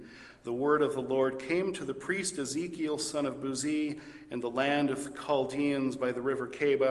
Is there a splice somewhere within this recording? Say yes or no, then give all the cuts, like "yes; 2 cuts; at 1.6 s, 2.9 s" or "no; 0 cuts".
no; 0 cuts